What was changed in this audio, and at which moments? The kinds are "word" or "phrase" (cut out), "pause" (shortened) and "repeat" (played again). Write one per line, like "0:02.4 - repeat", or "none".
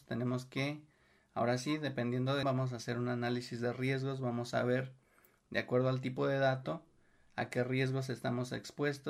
0:02.4 - phrase